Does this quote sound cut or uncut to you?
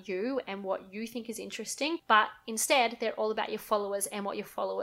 uncut